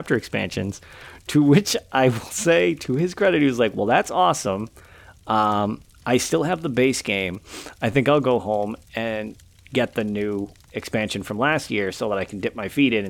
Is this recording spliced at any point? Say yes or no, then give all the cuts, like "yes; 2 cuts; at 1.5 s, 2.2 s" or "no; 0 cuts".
no; 0 cuts